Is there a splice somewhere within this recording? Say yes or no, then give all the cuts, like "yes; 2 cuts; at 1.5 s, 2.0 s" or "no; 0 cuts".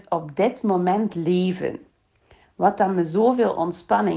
no; 0 cuts